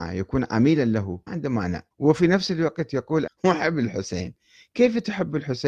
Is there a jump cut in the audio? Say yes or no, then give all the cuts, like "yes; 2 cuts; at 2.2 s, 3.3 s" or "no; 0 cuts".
yes; 3 cuts; at 1.3 s, 1.9 s, 3.3 s